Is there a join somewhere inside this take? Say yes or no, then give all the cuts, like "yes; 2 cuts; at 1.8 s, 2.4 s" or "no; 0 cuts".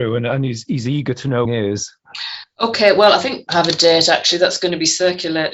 yes; 2 cuts; at 1.5 s, 3.5 s